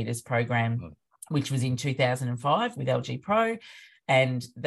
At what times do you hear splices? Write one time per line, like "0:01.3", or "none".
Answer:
none